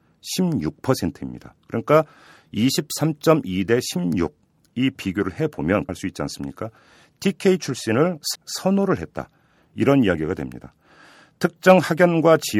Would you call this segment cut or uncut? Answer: cut